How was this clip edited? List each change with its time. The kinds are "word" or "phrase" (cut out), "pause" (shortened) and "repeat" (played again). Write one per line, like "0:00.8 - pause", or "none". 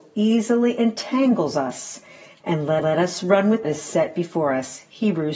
0:02.8 - repeat
0:03.6 - phrase